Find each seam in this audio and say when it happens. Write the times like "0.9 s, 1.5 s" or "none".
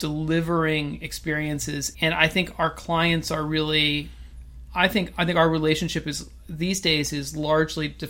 1.9 s